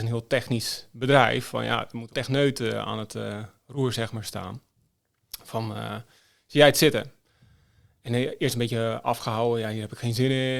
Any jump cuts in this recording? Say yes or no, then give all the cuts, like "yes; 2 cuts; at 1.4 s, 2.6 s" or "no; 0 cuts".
yes; 1 cut; at 2.1 s